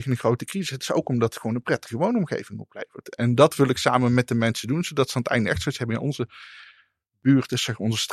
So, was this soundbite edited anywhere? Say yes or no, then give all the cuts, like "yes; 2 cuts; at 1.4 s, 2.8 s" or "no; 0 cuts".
no; 0 cuts